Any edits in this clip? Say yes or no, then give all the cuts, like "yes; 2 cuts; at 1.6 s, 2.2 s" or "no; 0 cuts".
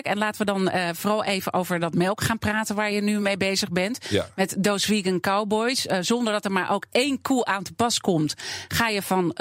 no; 0 cuts